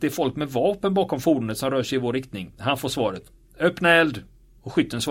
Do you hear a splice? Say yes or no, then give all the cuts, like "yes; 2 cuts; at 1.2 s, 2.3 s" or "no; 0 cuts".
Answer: no; 0 cuts